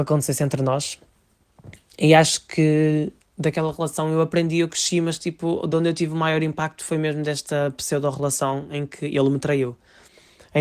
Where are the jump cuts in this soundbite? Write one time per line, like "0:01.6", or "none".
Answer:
none